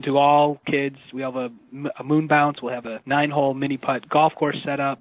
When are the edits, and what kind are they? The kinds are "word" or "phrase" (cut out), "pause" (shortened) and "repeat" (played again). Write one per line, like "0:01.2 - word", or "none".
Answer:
none